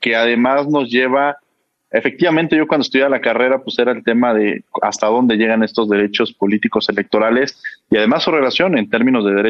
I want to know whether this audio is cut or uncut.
uncut